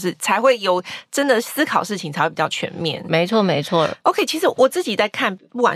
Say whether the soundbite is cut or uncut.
cut